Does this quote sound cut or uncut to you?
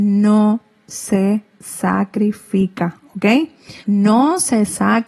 cut